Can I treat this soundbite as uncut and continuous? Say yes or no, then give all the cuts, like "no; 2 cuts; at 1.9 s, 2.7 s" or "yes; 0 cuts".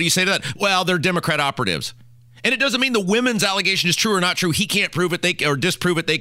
yes; 0 cuts